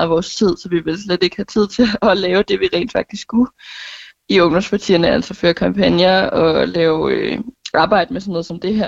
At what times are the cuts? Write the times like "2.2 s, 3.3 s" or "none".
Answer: none